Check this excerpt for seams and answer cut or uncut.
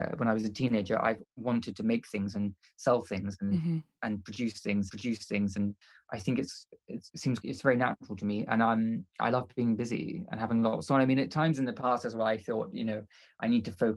cut